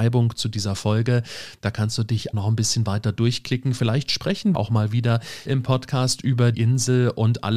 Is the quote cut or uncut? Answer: cut